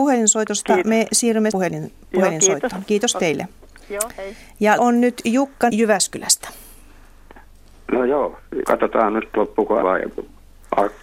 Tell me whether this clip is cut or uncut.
cut